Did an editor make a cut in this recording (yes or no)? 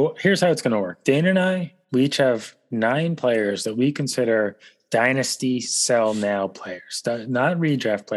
no